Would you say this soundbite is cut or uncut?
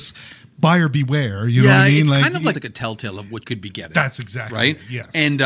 cut